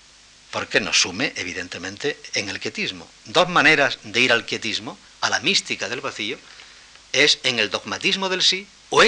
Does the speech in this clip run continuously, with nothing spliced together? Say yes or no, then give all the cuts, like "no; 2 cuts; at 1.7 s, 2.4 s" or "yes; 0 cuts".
yes; 0 cuts